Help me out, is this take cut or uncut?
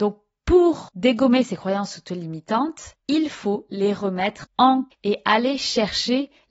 cut